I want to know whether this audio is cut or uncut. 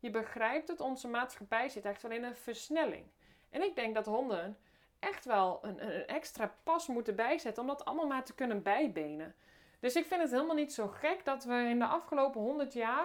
uncut